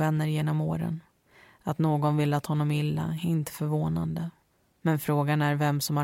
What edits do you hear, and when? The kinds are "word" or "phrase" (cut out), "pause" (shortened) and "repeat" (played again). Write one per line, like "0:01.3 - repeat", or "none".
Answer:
none